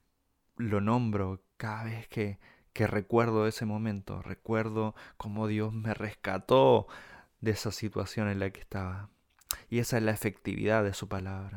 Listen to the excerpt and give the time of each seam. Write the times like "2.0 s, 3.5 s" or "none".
1.5 s